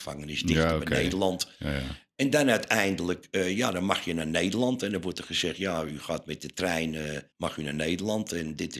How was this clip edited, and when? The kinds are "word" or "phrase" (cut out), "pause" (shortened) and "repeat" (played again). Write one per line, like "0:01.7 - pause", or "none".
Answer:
0:07.3 - pause